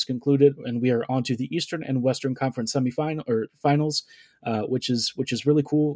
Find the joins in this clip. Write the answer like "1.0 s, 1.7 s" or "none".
none